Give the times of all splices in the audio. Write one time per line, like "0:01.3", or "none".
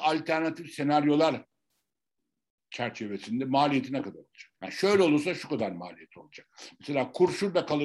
0:04.6

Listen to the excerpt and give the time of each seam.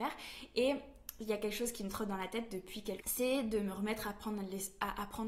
0:03.0

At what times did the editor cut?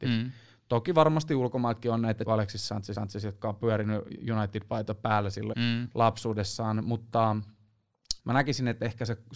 0:02.3
0:02.9
0:05.5
0:08.2

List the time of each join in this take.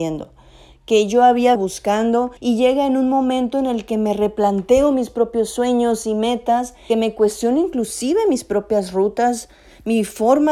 0:01.6
0:02.4
0:06.9

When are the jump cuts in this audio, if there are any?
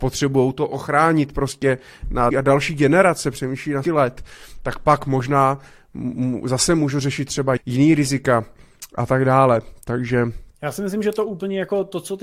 0:02.3
0:03.8
0:07.6
0:10.5

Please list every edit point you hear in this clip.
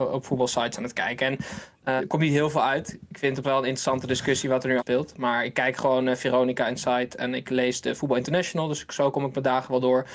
0:02.0
0:03.4
0:04.8

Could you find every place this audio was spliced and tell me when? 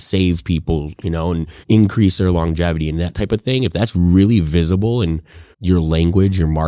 0:01.6
0:05.5

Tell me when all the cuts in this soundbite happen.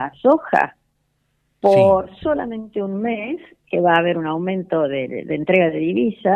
none

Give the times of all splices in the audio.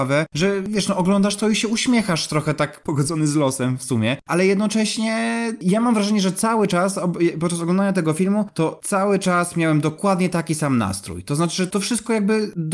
none

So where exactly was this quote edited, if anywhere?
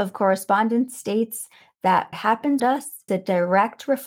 0:02.1
0:02.6
0:03.1

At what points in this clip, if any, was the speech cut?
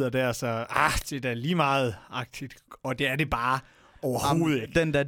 none

